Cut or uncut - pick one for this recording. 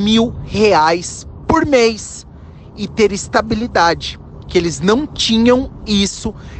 uncut